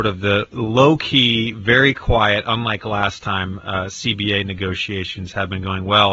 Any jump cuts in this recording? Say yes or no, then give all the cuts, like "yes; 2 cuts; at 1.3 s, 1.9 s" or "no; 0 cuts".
no; 0 cuts